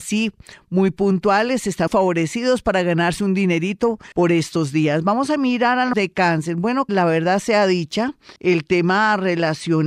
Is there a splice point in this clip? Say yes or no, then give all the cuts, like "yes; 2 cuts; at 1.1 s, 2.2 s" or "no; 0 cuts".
yes; 5 cuts; at 1.9 s, 4.1 s, 5.9 s, 6.9 s, 8.4 s